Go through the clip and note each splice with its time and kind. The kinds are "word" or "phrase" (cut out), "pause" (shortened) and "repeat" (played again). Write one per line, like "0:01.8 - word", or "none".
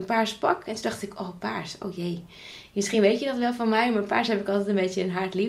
none